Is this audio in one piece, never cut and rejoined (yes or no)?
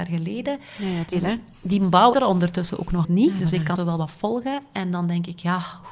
no